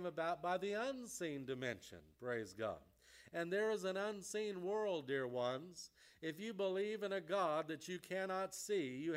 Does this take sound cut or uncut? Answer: uncut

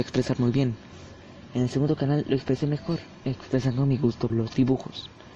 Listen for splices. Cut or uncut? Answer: cut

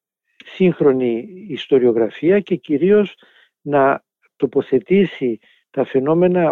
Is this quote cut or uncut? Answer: uncut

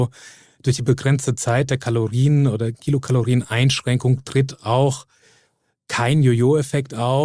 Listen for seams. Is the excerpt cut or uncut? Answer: uncut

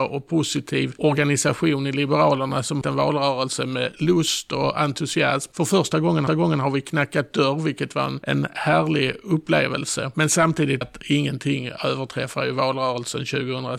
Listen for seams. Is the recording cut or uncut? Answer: cut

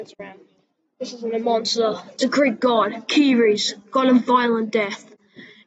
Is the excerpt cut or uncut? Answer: uncut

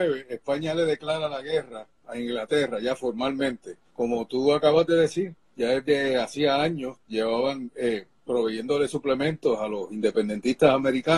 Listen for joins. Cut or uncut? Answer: cut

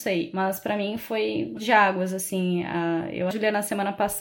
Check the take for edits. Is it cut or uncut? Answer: cut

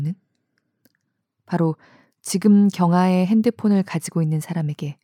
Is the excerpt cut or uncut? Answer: uncut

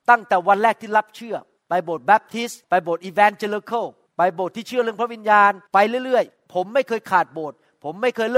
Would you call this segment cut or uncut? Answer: cut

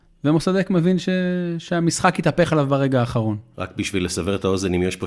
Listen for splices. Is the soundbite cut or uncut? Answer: uncut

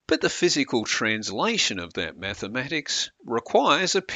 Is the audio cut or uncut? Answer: uncut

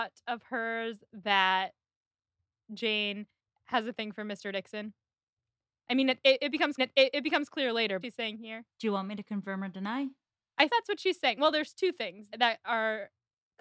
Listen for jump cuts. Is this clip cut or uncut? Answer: cut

